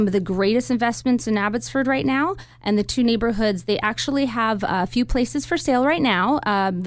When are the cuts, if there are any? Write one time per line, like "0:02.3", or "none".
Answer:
none